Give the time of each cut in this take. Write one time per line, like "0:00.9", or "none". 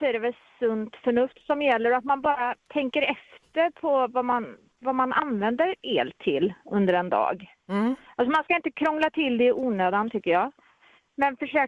0:02.6